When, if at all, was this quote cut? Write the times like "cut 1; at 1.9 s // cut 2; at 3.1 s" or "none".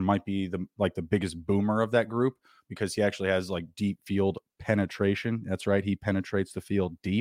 none